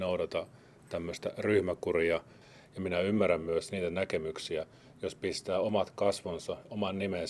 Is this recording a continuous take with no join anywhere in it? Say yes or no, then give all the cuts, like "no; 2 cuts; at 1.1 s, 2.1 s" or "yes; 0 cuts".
yes; 0 cuts